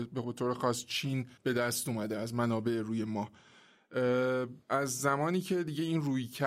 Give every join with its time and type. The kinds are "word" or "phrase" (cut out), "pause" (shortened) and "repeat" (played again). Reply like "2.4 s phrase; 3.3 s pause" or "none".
1.4 s pause; 4.6 s pause